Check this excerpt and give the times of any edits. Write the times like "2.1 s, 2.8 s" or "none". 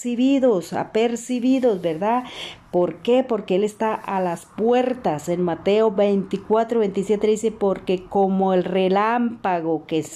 none